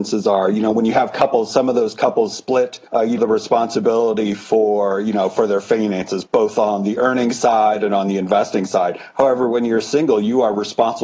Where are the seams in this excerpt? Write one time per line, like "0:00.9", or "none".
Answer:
0:02.9
0:03.2
0:06.3